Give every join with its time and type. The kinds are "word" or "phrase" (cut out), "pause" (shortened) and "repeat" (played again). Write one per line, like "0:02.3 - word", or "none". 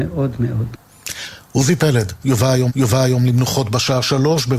0:02.7 - repeat